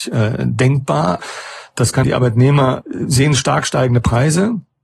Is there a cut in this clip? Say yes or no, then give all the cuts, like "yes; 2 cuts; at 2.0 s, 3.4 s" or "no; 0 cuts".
yes; 1 cut; at 2.0 s